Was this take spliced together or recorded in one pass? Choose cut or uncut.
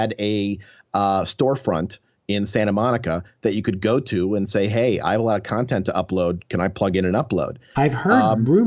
uncut